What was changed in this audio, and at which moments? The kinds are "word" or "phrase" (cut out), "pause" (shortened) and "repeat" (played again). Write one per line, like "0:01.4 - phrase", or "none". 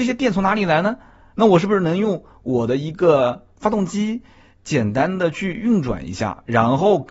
none